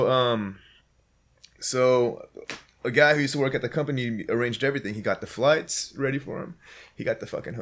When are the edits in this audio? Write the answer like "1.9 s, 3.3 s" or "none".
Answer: none